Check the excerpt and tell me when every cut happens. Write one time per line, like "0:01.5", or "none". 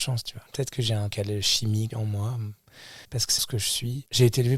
0:01.1
0:01.9
0:03.0
0:03.4